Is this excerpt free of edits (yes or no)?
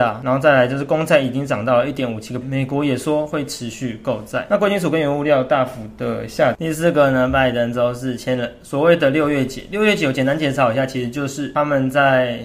no